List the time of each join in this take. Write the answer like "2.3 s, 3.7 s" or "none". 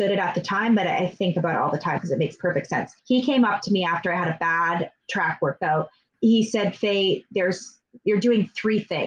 2.0 s, 3.0 s, 6.1 s